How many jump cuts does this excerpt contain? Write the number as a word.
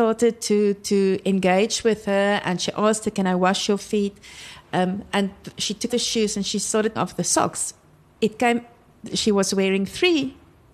two